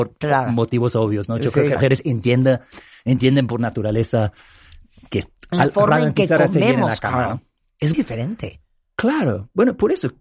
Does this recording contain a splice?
yes; 2 cuts; at 1.8 s, 7.9 s

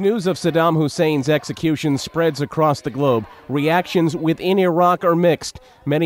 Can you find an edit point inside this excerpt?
no; 0 cuts

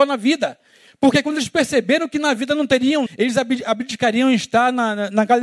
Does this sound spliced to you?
yes; 1 cut; at 3.1 s

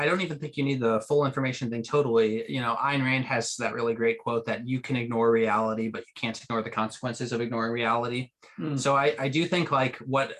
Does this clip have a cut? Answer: no; 0 cuts

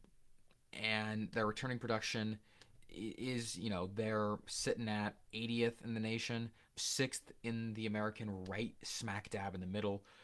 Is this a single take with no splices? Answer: no; 1 cut; at 6.7 s

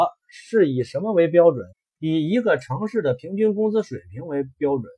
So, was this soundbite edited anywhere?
yes; 1 cut; at 1.7 s

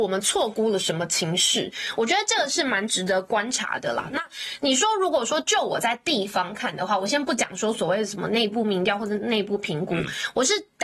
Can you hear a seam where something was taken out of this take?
no; 0 cuts

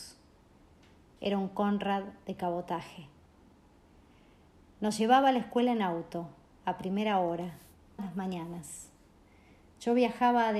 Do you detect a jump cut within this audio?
yes; 1 cut; at 8.0 s

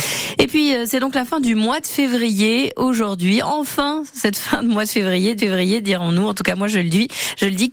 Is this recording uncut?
no; 1 cut; at 5.4 s

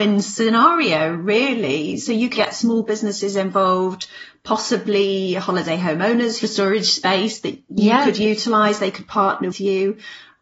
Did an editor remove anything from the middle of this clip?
yes; 3 cuts; at 2.3 s, 6.4 s, 9.5 s

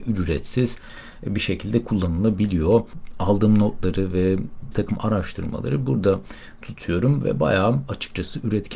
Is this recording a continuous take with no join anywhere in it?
no; 1 cut; at 4.7 s

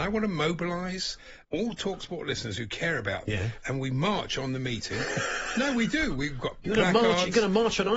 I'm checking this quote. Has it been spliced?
yes; 2 cuts; at 1.4 s, 3.3 s

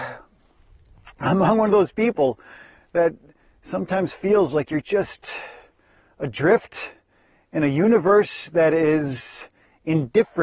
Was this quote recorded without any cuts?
yes; 0 cuts

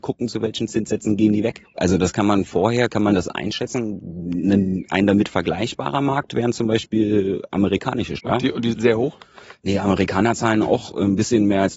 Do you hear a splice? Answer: yes; 4 cuts; at 1.6 s, 2.9 s, 8.2 s, 8.7 s

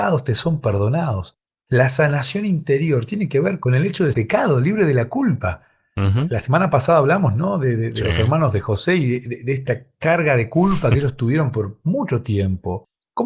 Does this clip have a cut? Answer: yes; 1 cut; at 4.1 s

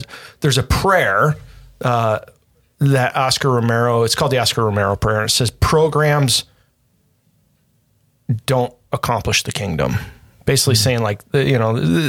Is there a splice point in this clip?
no; 0 cuts

